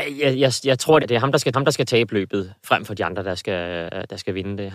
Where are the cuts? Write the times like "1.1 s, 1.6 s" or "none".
1.0 s, 1.5 s